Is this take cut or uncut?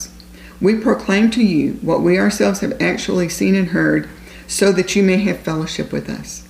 uncut